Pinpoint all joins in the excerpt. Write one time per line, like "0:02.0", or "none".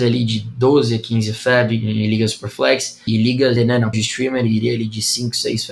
0:03.1
0:03.6
0:03.9